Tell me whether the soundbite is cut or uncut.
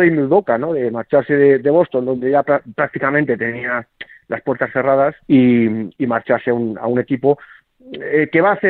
cut